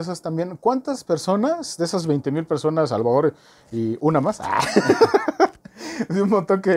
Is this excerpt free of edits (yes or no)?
yes